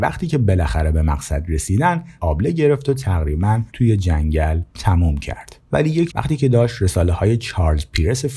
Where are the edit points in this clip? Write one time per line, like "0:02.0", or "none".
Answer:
0:02.2
0:03.7
0:04.7
0:05.6
0:06.1